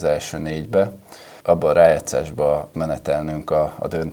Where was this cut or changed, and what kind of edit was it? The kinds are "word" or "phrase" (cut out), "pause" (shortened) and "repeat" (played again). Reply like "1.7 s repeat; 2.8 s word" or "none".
2.7 s word